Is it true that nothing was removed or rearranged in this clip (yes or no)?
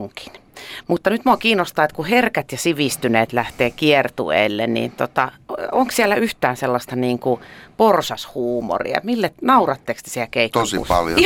yes